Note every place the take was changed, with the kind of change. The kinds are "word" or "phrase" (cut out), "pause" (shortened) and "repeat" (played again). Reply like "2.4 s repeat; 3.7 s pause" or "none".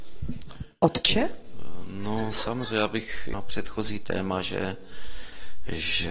3.3 s phrase